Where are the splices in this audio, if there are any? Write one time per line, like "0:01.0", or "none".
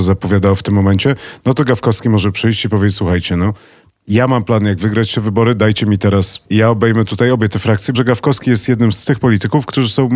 0:06.4
0:07.9